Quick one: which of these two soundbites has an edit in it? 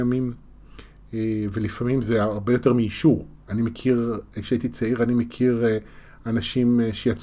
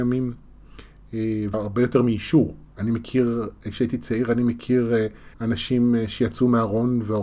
second; 2 cuts; at 1.5 s, 5.3 s

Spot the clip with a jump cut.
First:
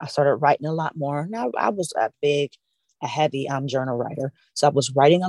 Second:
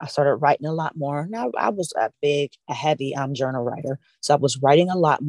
second; 1 cut; at 2.6 s

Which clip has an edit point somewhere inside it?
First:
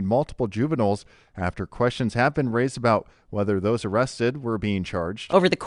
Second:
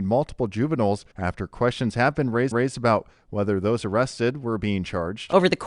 second; 2 cuts; at 1.1 s, 2.5 s

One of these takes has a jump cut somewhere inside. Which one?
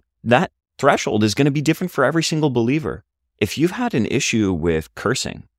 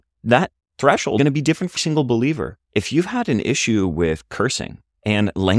second; 3 cuts; at 1.2 s, 1.8 s, 2.6 s

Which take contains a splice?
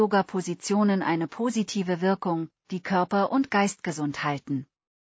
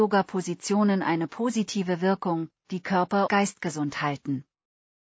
second; 1 cut; at 3.3 s

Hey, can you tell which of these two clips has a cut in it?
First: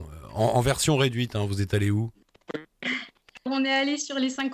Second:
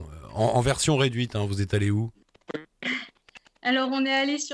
first; 1 cut; at 3.5 s

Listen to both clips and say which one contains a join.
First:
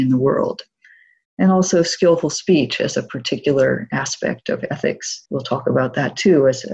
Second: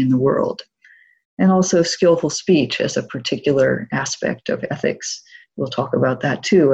first; 1 cut; at 5.2 s

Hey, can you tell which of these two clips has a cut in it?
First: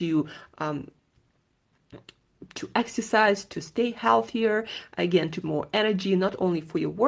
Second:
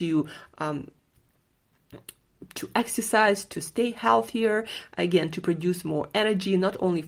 first; 1 cut; at 5.4 s

